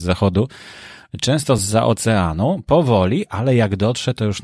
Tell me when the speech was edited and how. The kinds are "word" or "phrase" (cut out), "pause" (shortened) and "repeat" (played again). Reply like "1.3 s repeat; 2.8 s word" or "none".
none